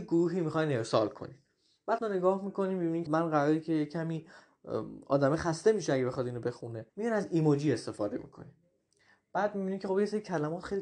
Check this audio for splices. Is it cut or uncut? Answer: cut